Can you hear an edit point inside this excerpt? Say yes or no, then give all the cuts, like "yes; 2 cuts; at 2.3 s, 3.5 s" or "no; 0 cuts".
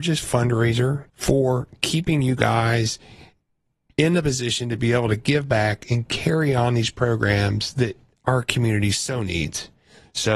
yes; 1 cut; at 1.1 s